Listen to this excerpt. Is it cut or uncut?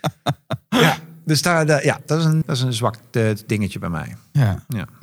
cut